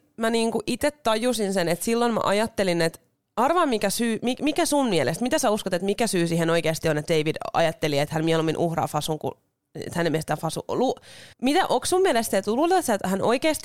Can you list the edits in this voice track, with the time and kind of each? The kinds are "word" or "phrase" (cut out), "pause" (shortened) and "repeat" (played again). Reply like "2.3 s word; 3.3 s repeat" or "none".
11.3 s pause